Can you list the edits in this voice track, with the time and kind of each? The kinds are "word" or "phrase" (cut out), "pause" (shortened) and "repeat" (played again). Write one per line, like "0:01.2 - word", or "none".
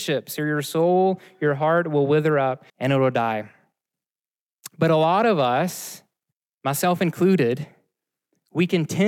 0:02.7 - pause
0:06.3 - pause